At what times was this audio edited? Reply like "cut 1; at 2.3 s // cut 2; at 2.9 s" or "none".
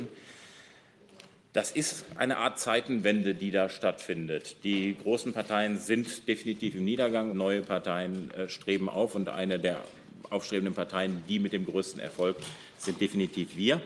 cut 1; at 7.3 s